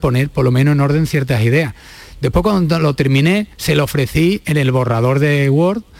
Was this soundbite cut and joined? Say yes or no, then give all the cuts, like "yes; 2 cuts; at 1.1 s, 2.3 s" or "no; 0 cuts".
yes; 1 cut; at 3.5 s